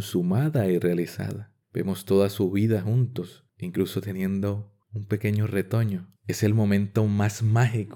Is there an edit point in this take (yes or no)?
yes